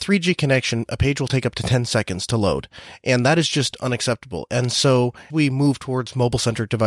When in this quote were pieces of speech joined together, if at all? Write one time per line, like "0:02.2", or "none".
0:05.3